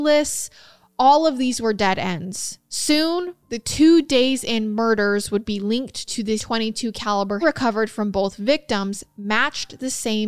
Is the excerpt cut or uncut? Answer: cut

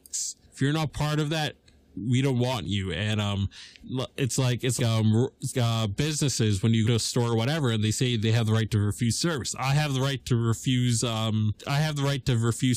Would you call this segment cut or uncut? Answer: cut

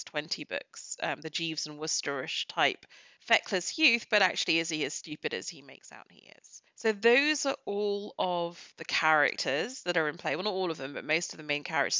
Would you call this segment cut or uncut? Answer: uncut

